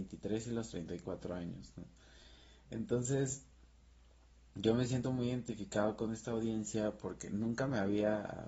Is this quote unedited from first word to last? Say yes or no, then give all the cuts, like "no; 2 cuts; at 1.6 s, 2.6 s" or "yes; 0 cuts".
yes; 0 cuts